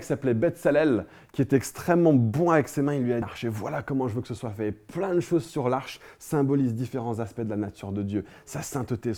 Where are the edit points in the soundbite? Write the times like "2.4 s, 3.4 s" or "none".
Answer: 3.2 s